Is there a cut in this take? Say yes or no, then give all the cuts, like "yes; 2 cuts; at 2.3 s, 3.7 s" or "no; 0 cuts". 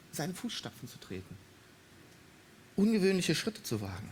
no; 0 cuts